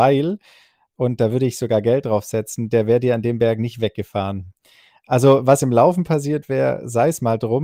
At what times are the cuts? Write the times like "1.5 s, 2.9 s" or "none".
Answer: none